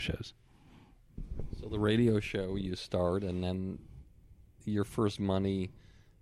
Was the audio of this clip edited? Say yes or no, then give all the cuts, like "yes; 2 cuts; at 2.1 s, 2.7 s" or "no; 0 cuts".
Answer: no; 0 cuts